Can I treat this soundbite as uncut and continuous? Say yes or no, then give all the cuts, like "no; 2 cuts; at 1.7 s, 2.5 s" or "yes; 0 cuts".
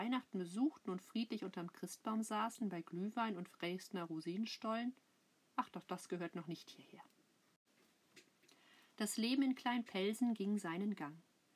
yes; 0 cuts